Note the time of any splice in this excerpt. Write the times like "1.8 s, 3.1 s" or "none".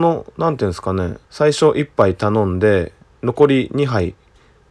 1.2 s